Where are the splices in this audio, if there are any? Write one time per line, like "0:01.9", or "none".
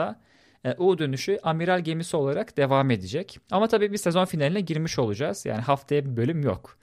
none